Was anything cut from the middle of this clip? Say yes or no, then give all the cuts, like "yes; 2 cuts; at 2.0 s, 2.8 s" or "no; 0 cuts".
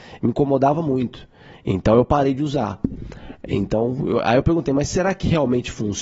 no; 0 cuts